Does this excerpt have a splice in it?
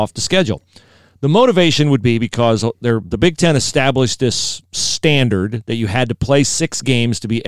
no; 0 cuts

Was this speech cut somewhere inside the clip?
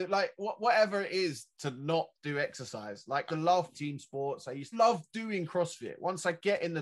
yes; 4 cuts; at 1.5 s, 3.3 s, 3.7 s, 4.7 s

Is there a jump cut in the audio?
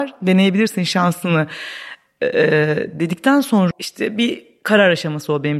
yes; 1 cut; at 3.7 s

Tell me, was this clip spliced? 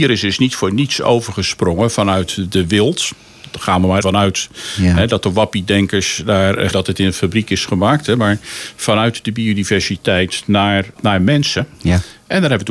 yes; 3 cuts; at 4.0 s, 6.7 s, 11.0 s

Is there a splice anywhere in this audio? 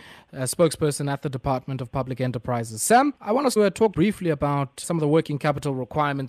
yes; 4 cuts; at 3.2 s, 3.6 s, 3.9 s, 4.8 s

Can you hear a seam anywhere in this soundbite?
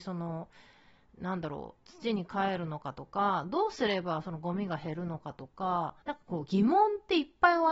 yes; 1 cut; at 6.0 s

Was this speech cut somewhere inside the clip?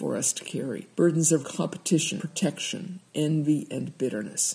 yes; 3 cuts; at 0.9 s, 1.4 s, 2.2 s

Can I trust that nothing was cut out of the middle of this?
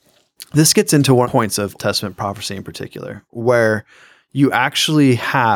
no; 2 cuts; at 1.2 s, 1.8 s

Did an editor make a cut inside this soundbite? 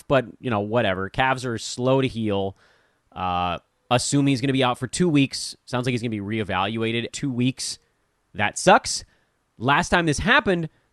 yes; 1 cut; at 7.1 s

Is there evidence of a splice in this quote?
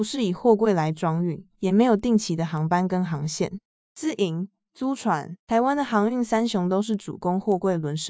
yes; 3 cuts; at 1.5 s, 3.7 s, 5.4 s

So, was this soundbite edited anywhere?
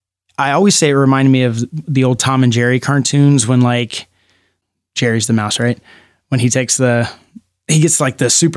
no; 0 cuts

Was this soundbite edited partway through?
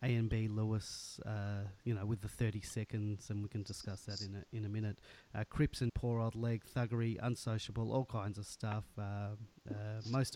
yes; 1 cut; at 5.9 s

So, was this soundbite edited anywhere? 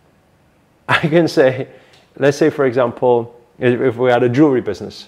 no; 0 cuts

